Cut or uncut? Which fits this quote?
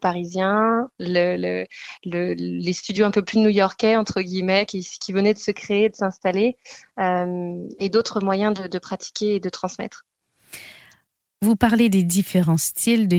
uncut